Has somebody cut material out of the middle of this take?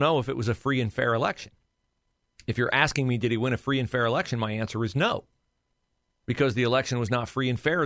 no; 0 cuts

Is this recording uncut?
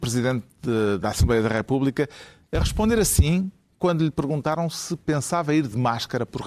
yes; 0 cuts

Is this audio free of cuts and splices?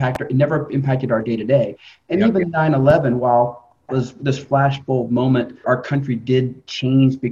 no; 2 cuts; at 3.9 s, 5.6 s

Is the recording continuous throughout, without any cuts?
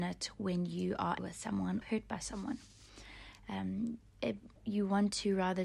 no; 3 cuts; at 1.2 s, 1.8 s, 4.6 s

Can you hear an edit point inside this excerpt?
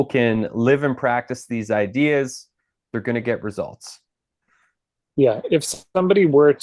no; 0 cuts

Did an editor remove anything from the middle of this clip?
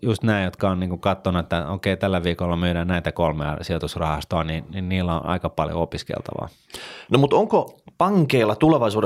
no; 0 cuts

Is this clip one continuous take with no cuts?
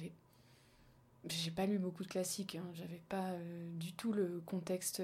yes; 0 cuts

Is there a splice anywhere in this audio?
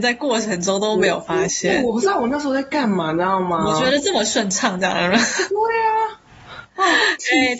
no; 0 cuts

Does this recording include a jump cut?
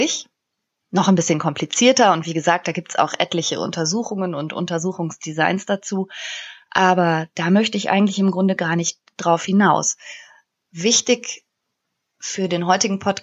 no; 0 cuts

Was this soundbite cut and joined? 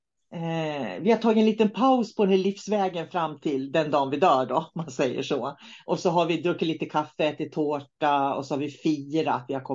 no; 0 cuts

